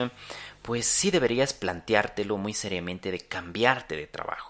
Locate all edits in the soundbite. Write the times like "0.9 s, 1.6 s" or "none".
none